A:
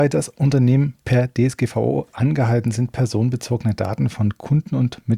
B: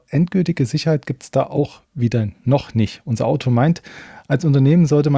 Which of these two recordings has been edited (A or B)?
B